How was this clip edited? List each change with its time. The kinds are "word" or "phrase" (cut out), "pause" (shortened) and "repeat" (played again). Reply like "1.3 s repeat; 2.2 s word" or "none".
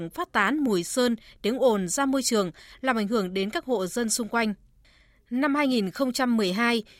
none